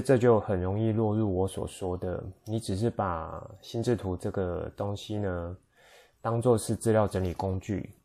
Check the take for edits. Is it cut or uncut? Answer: uncut